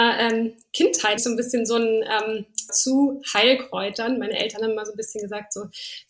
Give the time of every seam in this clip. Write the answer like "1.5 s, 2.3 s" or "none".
1.2 s, 2.7 s

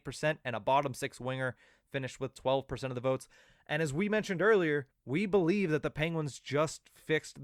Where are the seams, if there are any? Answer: 4.9 s

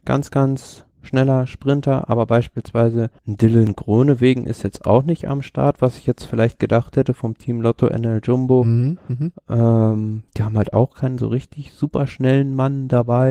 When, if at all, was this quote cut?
0.9 s, 3.2 s, 10.3 s

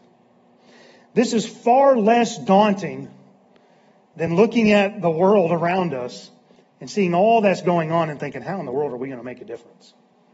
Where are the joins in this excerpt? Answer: none

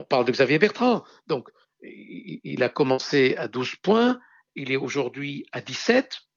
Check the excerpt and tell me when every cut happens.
none

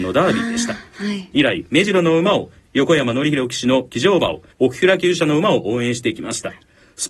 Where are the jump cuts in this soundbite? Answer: 4.5 s

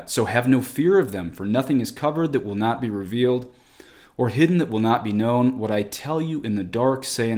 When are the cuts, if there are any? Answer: none

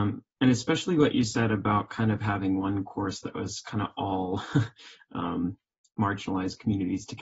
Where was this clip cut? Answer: none

